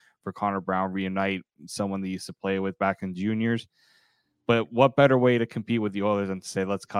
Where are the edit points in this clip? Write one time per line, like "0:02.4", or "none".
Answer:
none